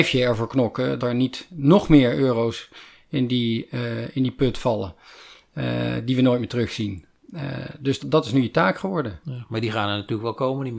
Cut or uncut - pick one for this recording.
cut